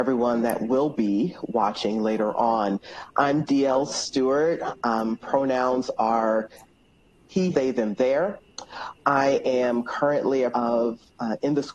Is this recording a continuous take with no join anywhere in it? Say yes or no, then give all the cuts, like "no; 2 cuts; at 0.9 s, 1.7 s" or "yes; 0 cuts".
no; 2 cuts; at 7.5 s, 10.5 s